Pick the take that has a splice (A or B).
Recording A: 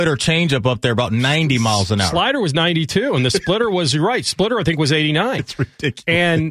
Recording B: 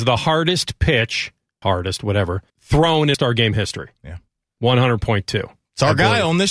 B